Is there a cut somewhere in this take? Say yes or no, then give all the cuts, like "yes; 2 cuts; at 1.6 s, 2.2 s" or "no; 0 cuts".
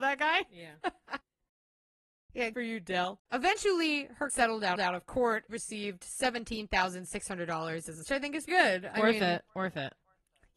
yes; 8 cuts; at 1.2 s, 2.5 s, 3.3 s, 4.3 s, 4.8 s, 5.5 s, 8.0 s, 8.5 s